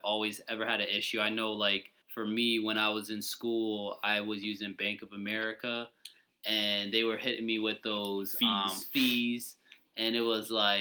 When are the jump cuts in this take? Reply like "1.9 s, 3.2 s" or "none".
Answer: 2.0 s